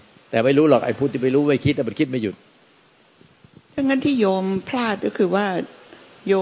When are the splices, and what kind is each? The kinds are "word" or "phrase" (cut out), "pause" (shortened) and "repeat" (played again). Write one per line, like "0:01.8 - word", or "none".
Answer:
none